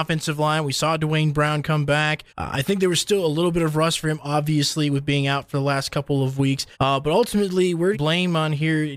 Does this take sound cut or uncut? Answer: cut